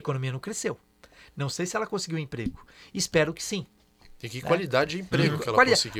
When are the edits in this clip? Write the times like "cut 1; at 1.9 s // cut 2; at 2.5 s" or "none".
none